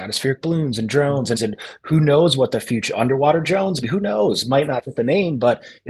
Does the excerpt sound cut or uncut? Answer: cut